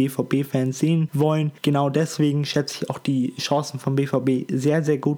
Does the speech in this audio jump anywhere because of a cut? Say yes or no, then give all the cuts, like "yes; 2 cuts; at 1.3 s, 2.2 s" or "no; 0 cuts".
no; 0 cuts